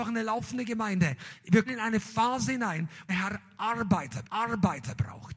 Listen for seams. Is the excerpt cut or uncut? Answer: cut